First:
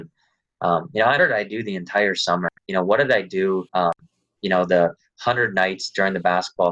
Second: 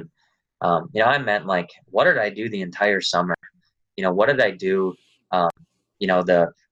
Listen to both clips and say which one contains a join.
first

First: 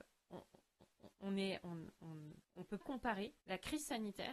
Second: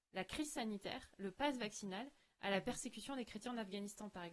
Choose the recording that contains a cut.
first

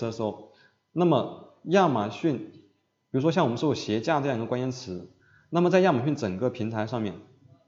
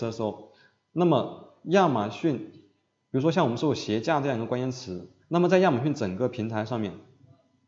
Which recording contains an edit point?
second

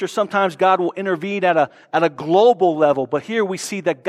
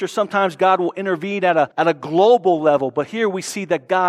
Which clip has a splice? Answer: second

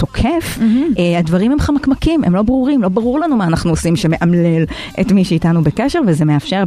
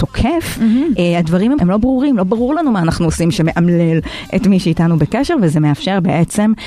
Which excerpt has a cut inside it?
second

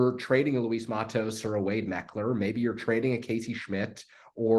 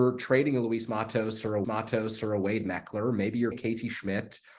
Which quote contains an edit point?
second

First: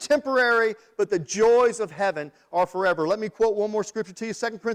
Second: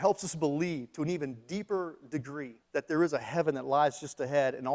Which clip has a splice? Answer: second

